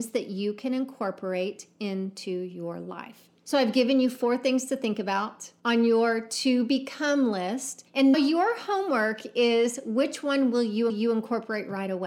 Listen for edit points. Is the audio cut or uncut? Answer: cut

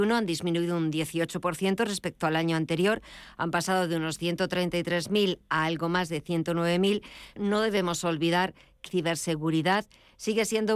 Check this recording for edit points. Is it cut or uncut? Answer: cut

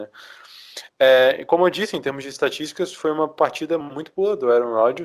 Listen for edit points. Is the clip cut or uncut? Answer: uncut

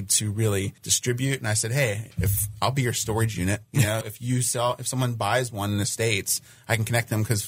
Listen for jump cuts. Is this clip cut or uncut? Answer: cut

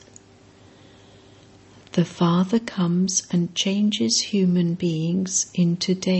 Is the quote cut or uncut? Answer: uncut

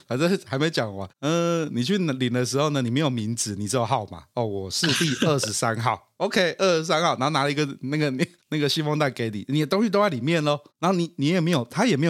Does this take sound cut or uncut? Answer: uncut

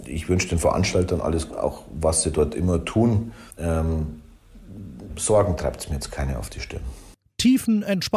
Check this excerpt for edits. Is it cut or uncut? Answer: cut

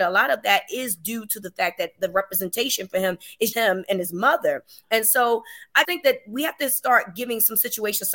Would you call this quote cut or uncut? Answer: cut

